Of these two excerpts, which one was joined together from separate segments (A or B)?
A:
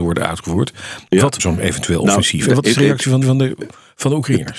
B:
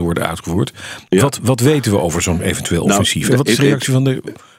A